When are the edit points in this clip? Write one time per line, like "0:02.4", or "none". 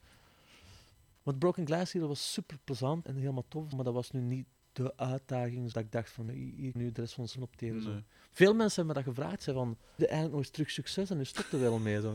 0:03.0
0:03.7
0:05.7
0:06.3
0:06.8
0:07.4
0:10.0